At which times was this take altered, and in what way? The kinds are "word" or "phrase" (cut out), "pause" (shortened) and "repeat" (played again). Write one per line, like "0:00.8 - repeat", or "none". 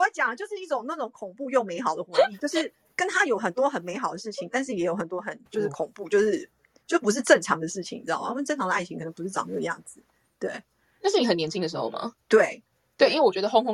0:12.2 - pause